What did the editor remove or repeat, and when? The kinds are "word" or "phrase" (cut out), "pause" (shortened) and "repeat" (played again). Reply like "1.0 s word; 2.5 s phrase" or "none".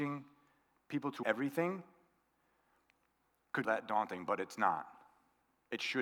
1.2 s word; 3.6 s word